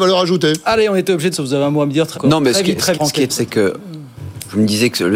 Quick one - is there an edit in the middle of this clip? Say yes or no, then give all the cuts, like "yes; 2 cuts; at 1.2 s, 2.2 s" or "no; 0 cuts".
yes; 4 cuts; at 1.3 s, 2.1 s, 2.9 s, 3.3 s